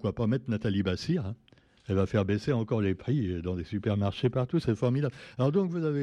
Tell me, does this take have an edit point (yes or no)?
no